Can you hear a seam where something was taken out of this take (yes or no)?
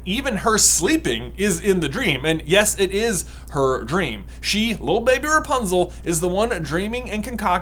no